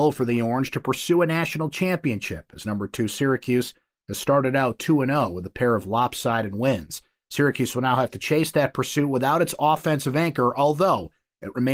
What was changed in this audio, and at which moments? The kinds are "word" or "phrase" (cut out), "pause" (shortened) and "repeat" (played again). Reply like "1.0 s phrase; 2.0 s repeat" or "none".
none